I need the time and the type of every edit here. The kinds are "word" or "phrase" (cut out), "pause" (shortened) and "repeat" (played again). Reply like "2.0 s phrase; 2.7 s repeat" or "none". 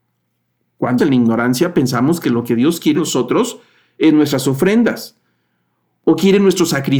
1.0 s word; 2.9 s word